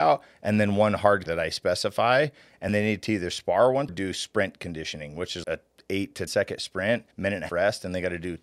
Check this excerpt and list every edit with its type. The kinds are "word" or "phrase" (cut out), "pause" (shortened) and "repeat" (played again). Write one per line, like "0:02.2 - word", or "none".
0:01.3 - word
0:02.7 - word
0:03.9 - phrase
0:05.4 - word
0:06.3 - word
0:07.1 - pause
0:07.5 - word